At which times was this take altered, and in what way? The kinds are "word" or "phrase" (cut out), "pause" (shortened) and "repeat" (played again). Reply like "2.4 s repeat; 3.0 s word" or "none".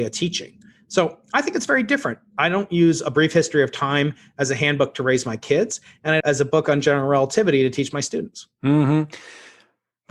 6.2 s phrase